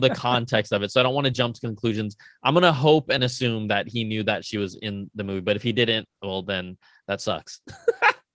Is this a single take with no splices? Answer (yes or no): yes